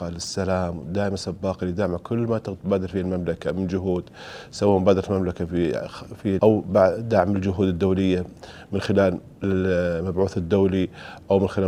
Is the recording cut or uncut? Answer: cut